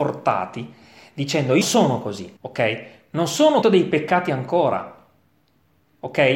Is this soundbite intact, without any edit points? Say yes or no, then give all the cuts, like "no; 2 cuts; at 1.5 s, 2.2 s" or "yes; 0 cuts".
no; 3 cuts; at 1.6 s, 2.4 s, 3.6 s